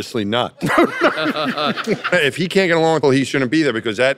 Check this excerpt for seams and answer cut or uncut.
cut